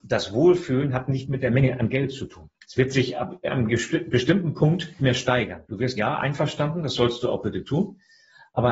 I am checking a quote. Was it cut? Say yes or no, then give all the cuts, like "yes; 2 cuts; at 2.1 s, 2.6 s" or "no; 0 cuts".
yes; 4 cuts; at 2.6 s, 5.0 s, 5.6 s, 6.0 s